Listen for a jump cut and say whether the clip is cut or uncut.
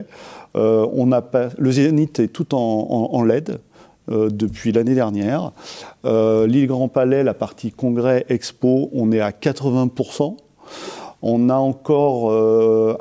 uncut